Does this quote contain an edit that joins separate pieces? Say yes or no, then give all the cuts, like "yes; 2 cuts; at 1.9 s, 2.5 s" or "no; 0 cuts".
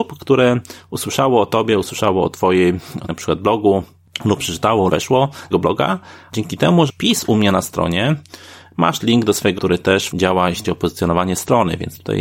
yes; 8 cuts; at 3.1 s, 4.9 s, 5.5 s, 6.9 s, 9.0 s, 9.6 s, 10.1 s, 10.6 s